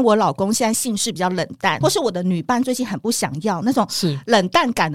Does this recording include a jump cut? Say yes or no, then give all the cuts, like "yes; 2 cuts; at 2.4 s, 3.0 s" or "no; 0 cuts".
yes; 1 cut; at 1.8 s